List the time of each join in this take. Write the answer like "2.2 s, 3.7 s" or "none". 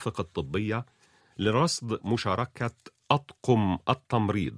none